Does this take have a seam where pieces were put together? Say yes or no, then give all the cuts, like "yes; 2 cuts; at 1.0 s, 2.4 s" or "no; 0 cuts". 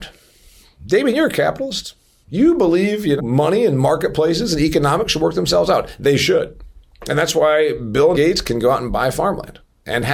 yes; 2 cuts; at 3.2 s, 8.1 s